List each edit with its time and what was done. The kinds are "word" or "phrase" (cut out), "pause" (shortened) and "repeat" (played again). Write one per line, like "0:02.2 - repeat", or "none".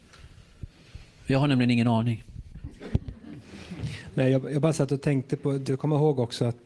0:05.7 - phrase